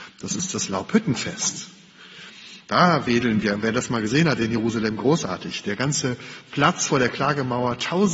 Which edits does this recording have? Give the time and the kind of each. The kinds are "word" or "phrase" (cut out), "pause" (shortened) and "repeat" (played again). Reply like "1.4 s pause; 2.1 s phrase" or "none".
none